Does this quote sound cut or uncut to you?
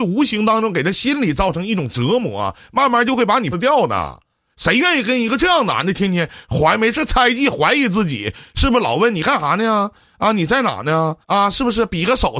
cut